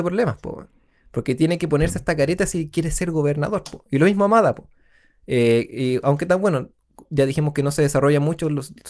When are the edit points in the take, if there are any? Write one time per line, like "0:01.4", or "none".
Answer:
none